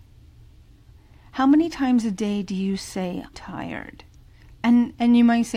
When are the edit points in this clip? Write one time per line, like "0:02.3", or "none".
0:03.3
0:04.6